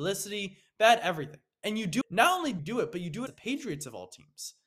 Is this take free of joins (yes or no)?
no